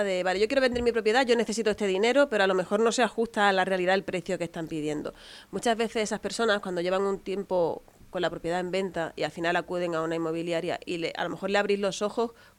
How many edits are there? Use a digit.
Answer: 0